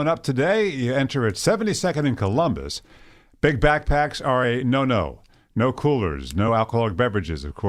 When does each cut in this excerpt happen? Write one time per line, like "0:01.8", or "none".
none